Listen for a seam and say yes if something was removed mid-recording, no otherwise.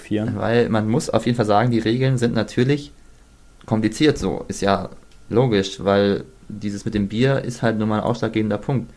no